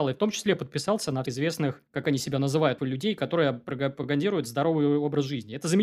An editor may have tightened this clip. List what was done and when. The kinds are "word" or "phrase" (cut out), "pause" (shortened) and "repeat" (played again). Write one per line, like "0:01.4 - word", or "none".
0:01.2 - word
0:01.9 - pause
0:02.8 - word